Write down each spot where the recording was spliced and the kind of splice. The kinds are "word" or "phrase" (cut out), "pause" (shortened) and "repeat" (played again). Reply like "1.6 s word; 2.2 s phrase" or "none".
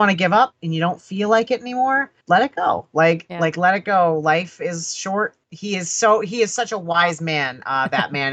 2.2 s pause; 5.4 s pause